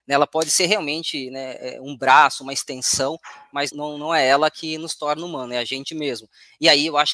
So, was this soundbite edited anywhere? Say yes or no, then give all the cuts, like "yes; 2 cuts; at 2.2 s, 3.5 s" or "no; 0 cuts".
yes; 1 cut; at 3.7 s